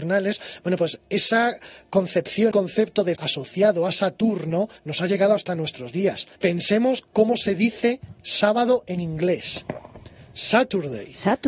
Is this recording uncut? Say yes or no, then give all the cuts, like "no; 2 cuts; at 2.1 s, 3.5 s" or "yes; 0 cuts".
no; 4 cuts; at 2.5 s, 3.1 s, 4.8 s, 6.4 s